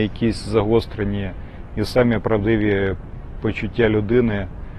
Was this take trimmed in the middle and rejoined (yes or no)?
no